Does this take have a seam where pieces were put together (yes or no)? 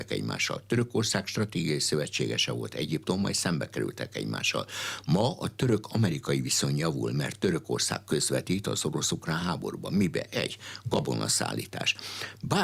no